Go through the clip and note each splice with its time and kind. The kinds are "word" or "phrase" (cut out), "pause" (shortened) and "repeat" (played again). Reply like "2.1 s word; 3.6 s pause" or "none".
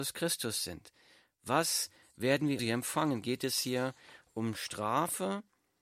2.6 s word